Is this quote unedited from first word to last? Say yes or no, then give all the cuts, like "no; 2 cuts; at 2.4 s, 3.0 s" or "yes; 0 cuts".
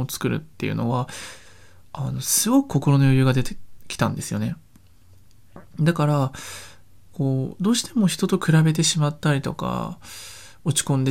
yes; 0 cuts